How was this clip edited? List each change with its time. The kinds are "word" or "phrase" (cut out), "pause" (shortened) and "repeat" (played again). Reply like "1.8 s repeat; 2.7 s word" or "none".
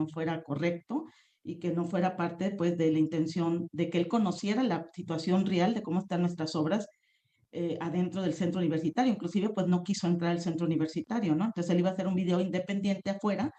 none